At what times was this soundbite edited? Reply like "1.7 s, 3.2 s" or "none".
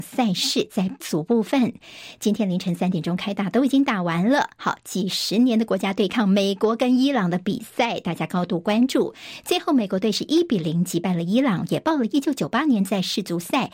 1.0 s